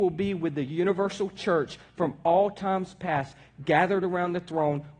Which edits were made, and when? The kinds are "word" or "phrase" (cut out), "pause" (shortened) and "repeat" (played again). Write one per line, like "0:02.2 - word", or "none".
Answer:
none